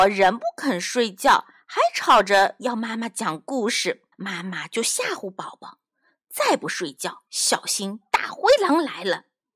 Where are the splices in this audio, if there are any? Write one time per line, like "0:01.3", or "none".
0:04.1
0:07.3